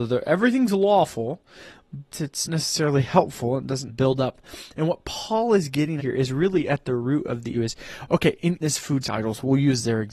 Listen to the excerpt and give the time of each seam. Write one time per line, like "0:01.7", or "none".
0:02.1
0:02.5
0:03.9
0:06.0
0:07.5
0:08.6
0:09.0